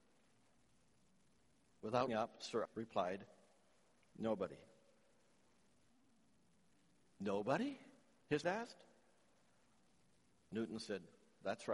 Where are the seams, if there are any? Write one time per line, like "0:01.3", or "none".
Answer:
0:02.1
0:02.6
0:08.4